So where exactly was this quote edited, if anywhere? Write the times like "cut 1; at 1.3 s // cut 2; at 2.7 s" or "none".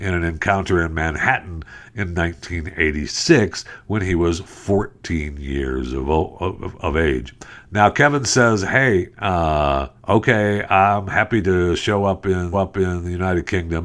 cut 1; at 10.0 s // cut 2; at 12.5 s